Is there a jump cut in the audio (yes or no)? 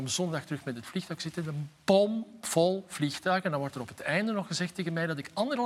no